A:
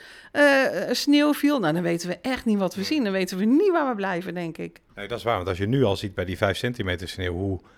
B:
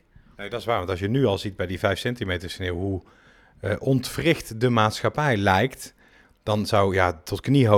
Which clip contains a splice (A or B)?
A